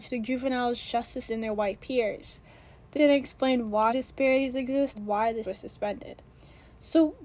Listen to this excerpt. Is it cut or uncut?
cut